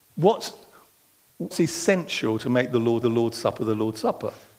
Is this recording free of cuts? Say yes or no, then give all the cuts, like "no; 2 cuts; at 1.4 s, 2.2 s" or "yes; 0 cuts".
no; 2 cuts; at 1.5 s, 3.0 s